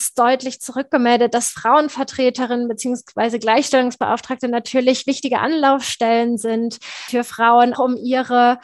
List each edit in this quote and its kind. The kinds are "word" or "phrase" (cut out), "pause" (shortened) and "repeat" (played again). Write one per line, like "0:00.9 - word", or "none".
0:07.7 - word

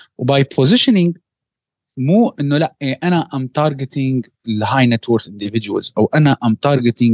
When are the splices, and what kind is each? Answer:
none

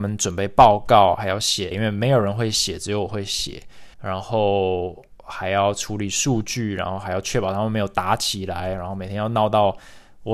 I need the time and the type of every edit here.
0:01.7 - word
0:03.9 - pause

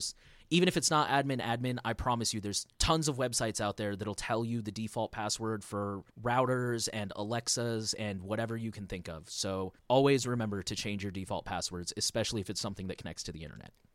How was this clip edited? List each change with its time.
0:02.7 - pause
0:06.1 - pause
0:09.8 - pause

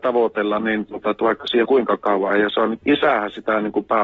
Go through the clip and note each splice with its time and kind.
0:01.6 - word
0:02.3 - word
0:02.8 - word

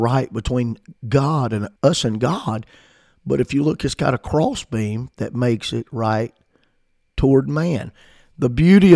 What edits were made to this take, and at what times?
0:01.0 - pause
0:01.8 - pause

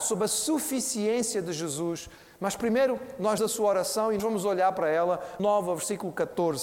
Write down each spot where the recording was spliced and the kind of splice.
0:03.4 - word
0:04.2 - word
0:05.4 - word

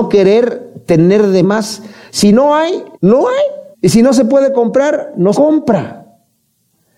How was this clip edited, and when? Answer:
0:01.4 - phrase
0:02.9 - pause
0:03.7 - pause
0:05.3 - word

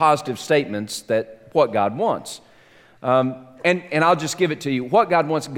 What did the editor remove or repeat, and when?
none

